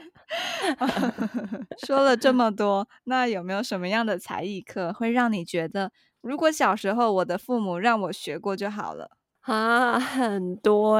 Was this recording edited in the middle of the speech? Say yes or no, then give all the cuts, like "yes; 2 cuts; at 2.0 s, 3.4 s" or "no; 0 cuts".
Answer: yes; 1 cut; at 6.1 s